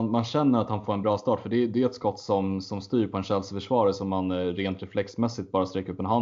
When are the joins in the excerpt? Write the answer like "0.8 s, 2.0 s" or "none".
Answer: none